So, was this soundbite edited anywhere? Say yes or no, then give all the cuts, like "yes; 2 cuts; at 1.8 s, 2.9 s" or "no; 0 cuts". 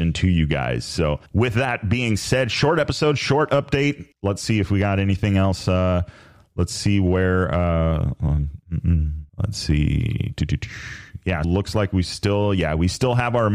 yes; 4 cuts; at 1.3 s, 4.1 s, 9.3 s, 11.4 s